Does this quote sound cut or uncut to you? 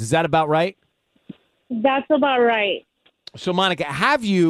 uncut